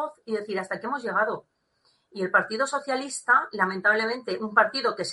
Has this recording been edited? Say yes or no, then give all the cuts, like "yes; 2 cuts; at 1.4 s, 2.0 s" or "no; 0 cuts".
no; 0 cuts